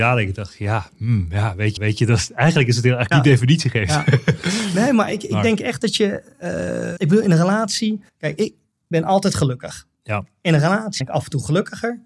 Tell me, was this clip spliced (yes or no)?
yes